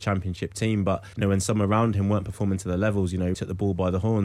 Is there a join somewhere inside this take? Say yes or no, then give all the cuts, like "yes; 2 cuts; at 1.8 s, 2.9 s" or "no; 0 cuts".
yes; 2 cuts; at 1.1 s, 3.3 s